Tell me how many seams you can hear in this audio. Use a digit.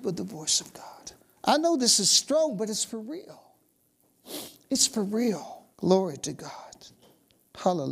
2